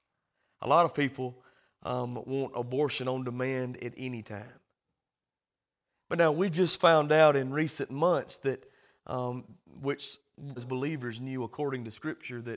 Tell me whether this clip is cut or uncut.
cut